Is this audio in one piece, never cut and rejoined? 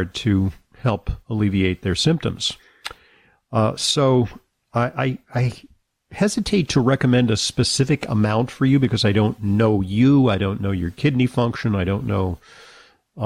yes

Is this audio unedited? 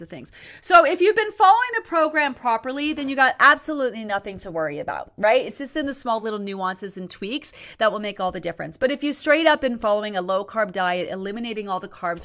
yes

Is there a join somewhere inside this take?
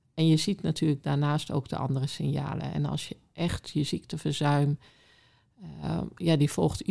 no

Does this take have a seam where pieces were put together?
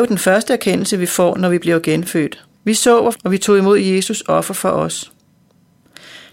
yes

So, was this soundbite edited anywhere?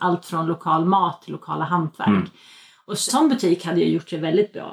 yes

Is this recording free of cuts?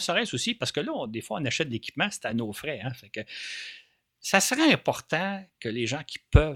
yes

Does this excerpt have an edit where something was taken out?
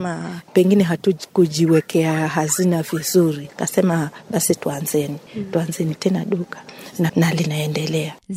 yes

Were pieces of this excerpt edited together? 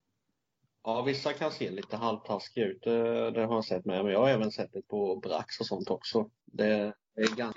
yes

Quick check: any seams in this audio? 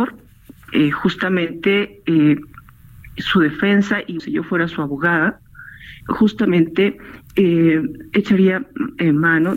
yes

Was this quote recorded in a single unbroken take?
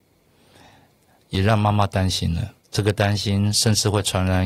no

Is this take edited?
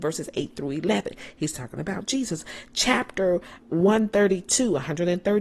yes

